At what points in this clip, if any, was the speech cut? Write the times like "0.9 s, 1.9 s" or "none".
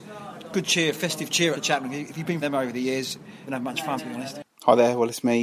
1.5 s, 2.4 s, 3.5 s, 4.0 s, 4.5 s